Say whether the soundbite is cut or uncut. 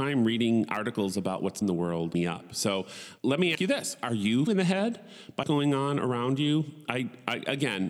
cut